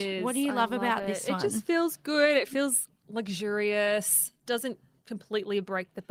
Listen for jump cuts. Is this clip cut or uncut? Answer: uncut